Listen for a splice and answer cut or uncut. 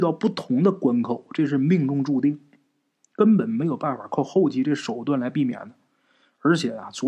uncut